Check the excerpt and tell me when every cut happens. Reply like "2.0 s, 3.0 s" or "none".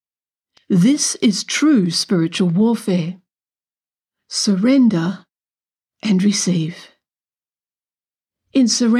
none

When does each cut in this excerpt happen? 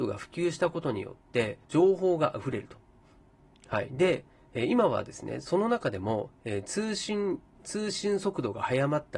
1.6 s, 7.6 s

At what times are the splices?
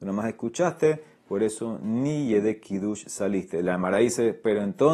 none

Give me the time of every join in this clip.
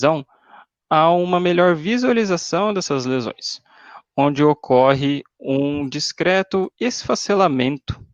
6.7 s

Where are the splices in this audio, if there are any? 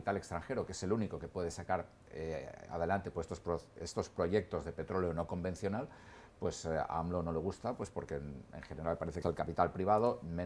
9.2 s

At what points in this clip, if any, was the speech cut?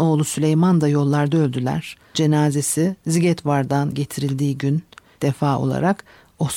2.1 s, 3.9 s, 5.2 s

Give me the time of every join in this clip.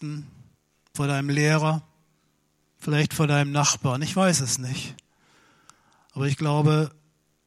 none

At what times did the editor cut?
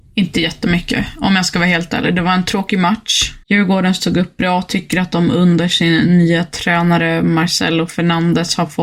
3.4 s

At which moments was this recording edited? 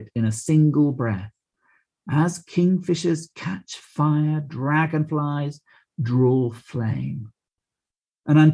none

